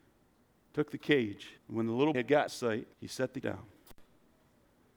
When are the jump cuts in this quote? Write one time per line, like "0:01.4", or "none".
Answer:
0:01.6
0:02.1
0:02.5
0:02.9
0:03.4